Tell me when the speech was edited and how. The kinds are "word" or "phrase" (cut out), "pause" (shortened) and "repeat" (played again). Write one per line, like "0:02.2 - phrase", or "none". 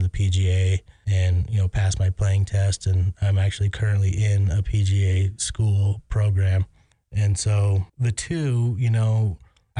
0:07.9 - pause